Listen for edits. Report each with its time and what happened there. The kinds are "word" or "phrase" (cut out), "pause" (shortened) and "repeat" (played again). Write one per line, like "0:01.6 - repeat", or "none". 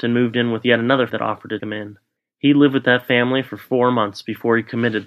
0:01.1 - word
0:01.6 - word
0:02.2 - pause